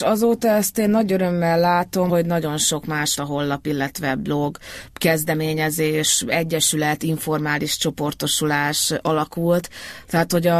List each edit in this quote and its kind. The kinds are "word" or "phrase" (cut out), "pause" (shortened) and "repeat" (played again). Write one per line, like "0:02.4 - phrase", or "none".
0:02.1 - word
0:03.2 - word